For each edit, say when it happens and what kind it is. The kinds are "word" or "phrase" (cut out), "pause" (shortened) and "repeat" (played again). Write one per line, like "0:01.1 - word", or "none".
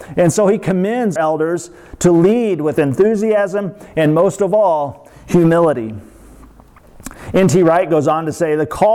0:01.2 - word
0:02.8 - phrase